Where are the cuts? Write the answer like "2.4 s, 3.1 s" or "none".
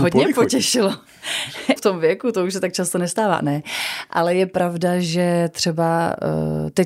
1.8 s